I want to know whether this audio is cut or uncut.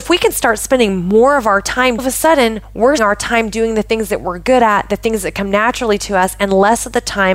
cut